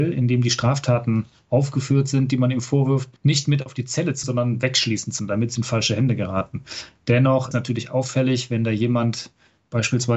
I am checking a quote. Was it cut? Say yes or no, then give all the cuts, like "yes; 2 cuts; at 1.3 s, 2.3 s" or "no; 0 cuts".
yes; 5 cuts; at 3.2 s, 4.2 s, 5.2 s, 5.6 s, 7.5 s